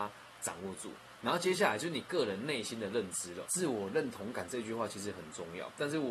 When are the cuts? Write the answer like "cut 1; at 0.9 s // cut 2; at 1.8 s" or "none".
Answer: cut 1; at 3.4 s